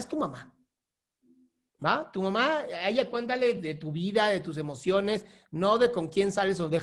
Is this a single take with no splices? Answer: yes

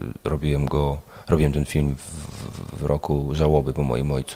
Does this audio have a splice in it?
no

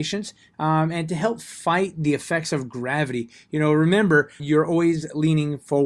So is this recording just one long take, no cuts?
no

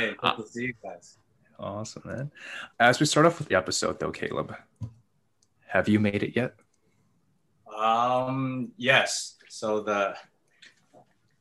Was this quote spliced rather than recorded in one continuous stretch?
yes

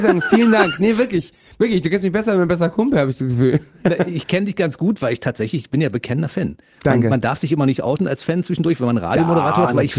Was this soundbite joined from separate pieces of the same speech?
no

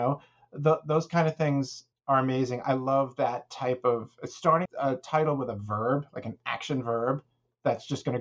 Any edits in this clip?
yes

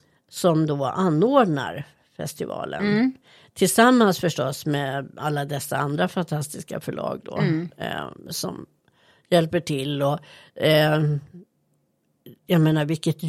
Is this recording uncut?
yes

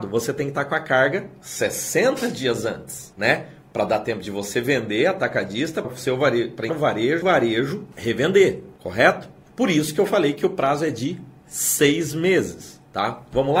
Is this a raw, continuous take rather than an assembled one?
no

